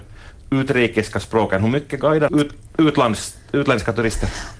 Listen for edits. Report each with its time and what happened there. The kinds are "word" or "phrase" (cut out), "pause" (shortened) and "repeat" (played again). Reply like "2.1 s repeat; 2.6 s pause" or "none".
2.3 s word